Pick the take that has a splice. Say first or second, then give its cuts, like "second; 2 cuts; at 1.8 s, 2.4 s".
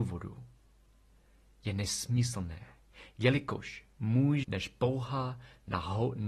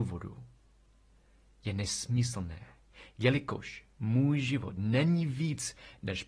first; 1 cut; at 4.4 s